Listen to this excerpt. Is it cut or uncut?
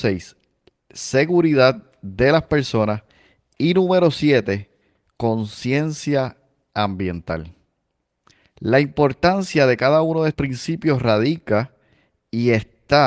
cut